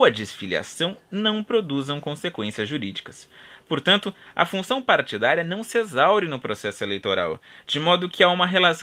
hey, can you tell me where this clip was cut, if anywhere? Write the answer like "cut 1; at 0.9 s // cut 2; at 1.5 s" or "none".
none